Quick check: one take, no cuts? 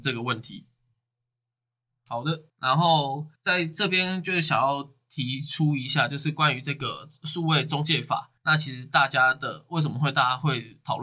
no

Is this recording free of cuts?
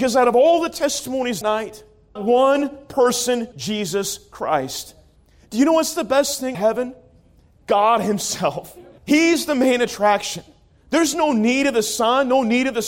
no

